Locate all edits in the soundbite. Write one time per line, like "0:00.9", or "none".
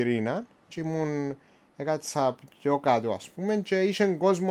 none